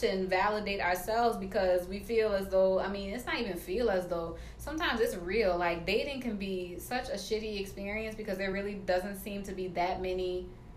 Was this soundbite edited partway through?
no; 0 cuts

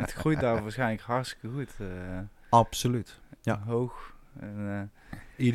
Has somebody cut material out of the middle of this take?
no; 0 cuts

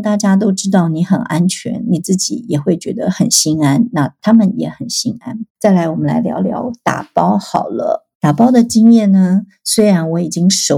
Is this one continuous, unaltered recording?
no; 2 cuts; at 5.5 s, 8.1 s

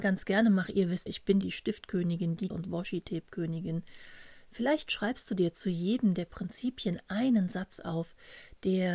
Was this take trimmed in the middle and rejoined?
yes; 3 cuts; at 1.1 s, 1.4 s, 2.5 s

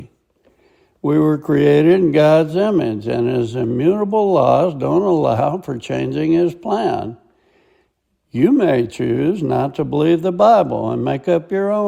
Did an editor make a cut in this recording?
no; 0 cuts

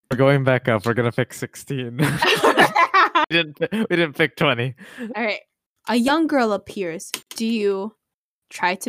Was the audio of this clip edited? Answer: no; 0 cuts

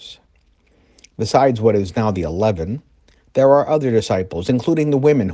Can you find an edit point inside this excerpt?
no; 0 cuts

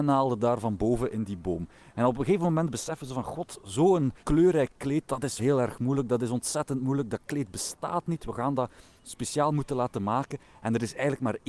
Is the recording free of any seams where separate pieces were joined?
no; 2 cuts; at 4.2 s, 5.4 s

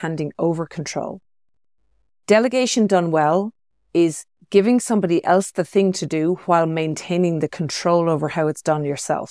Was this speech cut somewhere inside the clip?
no; 0 cuts

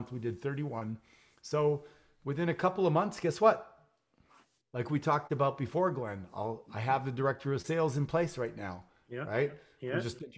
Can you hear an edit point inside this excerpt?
no; 0 cuts

